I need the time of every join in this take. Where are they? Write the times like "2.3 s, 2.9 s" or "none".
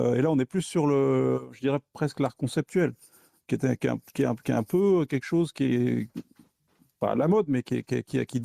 none